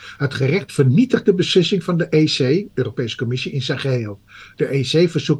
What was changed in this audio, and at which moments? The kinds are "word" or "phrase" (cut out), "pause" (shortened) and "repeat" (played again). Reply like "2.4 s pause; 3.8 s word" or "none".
none